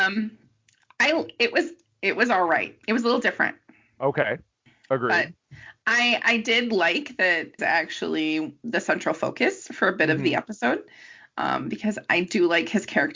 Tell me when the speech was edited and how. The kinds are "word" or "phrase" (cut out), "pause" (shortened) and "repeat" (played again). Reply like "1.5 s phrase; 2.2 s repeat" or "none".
2.8 s pause; 7.6 s phrase